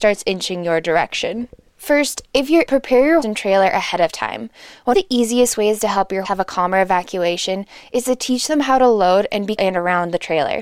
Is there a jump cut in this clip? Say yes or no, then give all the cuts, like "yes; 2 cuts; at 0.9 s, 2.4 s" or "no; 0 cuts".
yes; 5 cuts; at 2.7 s, 3.2 s, 4.9 s, 6.2 s, 9.6 s